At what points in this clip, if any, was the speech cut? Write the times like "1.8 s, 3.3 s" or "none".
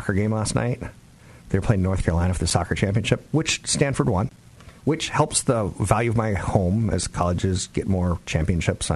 1.4 s, 4.8 s